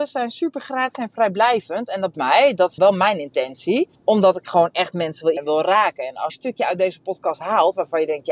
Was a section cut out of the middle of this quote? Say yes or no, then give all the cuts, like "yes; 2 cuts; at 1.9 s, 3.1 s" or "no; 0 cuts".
yes; 5 cuts; at 2.1 s, 2.8 s, 3.9 s, 5.4 s, 6.3 s